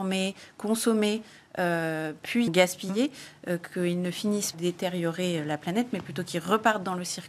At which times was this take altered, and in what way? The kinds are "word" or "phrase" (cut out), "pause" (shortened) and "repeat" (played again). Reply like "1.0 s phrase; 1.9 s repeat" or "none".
2.5 s word; 4.5 s phrase